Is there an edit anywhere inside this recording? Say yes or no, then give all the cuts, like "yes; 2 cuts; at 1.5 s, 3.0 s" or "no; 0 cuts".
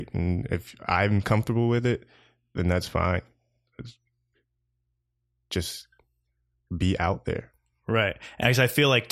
no; 0 cuts